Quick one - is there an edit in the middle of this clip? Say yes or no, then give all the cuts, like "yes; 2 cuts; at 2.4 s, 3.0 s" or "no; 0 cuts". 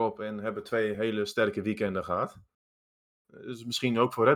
no; 0 cuts